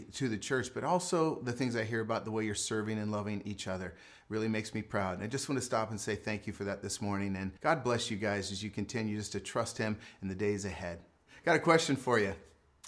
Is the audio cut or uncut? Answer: cut